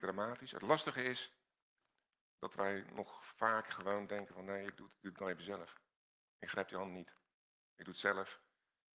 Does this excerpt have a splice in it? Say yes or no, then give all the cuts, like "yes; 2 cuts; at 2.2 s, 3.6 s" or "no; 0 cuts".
no; 0 cuts